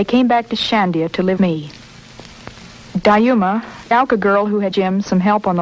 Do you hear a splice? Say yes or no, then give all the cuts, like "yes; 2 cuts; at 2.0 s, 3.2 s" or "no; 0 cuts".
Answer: yes; 3 cuts; at 1.4 s, 3.9 s, 4.7 s